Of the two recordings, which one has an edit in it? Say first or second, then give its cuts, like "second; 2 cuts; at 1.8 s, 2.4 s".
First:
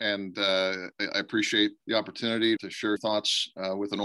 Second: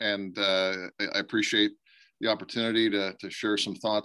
first; 3 cuts; at 1.8 s, 2.6 s, 3.0 s